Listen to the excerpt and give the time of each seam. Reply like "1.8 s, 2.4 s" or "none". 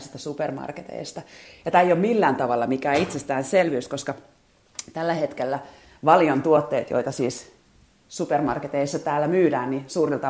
none